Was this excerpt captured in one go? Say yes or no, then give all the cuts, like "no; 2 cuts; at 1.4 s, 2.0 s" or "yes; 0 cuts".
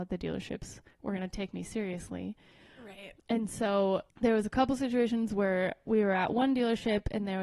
no; 2 cuts; at 3.2 s, 4.1 s